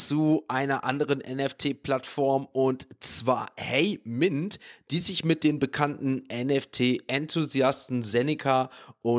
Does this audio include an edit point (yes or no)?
no